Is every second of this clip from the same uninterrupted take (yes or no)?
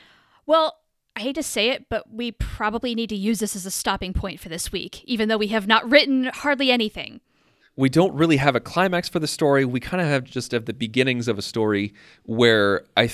yes